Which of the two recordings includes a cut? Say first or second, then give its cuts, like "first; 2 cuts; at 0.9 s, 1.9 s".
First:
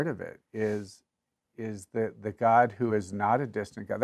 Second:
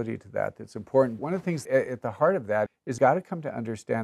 second; 4 cuts; at 1.2 s, 1.7 s, 2.7 s, 3.0 s